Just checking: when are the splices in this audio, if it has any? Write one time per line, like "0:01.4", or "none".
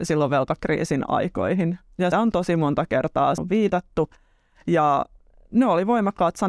0:02.1
0:03.4